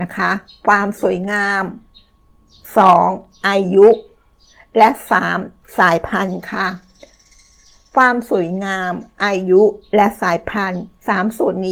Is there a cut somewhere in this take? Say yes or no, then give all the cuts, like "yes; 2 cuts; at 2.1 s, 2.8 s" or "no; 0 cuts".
no; 0 cuts